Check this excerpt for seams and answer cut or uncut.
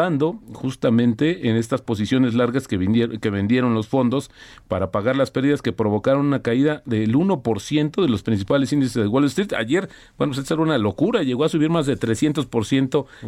uncut